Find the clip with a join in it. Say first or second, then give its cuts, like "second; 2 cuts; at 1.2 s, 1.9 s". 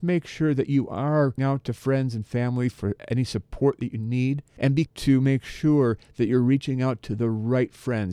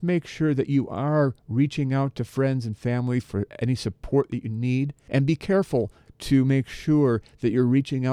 first; 2 cuts; at 1.4 s, 4.9 s